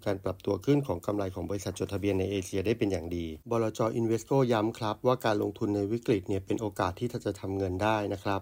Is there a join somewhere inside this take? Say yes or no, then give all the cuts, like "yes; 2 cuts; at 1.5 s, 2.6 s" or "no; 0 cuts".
yes; 1 cut; at 3.4 s